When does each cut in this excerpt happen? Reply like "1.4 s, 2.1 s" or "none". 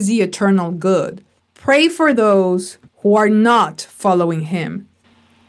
2.9 s